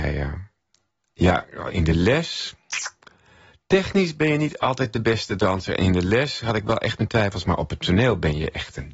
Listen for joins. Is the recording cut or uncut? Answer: uncut